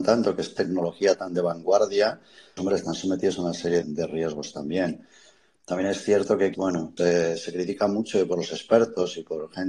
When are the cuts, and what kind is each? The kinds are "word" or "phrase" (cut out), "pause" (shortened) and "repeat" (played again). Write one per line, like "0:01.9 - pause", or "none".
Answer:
0:02.6 - word
0:03.8 - word
0:06.5 - word
0:07.0 - word